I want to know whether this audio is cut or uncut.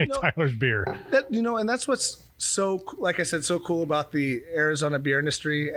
uncut